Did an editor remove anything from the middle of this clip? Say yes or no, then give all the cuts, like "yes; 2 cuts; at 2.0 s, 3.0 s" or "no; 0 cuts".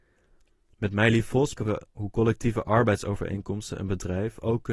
yes; 1 cut; at 1.6 s